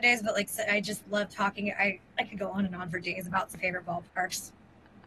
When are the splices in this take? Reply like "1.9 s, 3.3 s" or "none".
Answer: 2.1 s, 3.5 s